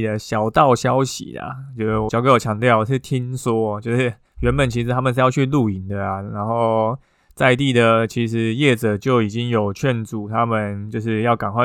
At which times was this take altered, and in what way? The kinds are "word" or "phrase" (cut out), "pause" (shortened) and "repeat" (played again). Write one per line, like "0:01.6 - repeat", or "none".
0:02.1 - phrase